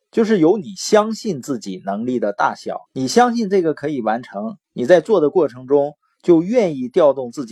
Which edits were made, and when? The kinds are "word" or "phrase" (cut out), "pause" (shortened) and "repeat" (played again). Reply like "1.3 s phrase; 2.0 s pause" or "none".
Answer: 2.9 s pause; 4.6 s pause